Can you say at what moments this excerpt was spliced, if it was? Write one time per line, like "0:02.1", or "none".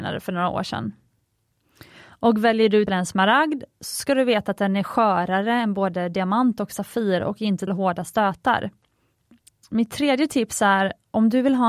0:02.9
0:07.7